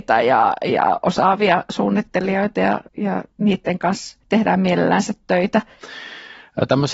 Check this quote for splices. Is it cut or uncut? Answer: cut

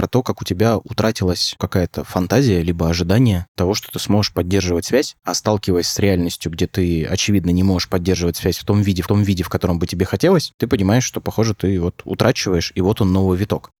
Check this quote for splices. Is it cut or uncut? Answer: cut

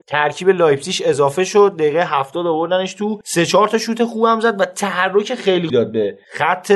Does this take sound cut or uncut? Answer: cut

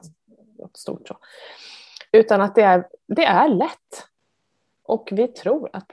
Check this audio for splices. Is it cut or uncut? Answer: uncut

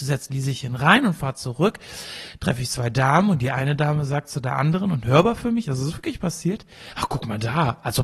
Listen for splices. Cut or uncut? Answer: uncut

